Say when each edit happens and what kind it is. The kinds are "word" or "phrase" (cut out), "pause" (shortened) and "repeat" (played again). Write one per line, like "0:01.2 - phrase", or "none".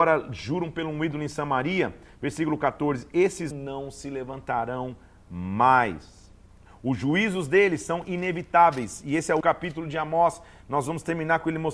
0:03.5 - phrase
0:06.6 - pause
0:09.4 - word